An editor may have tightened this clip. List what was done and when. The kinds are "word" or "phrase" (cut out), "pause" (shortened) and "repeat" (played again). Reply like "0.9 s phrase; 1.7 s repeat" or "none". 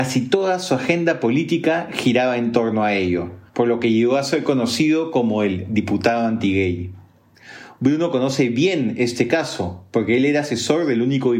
3.5 s pause